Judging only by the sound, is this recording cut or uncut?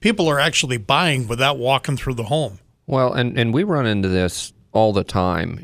uncut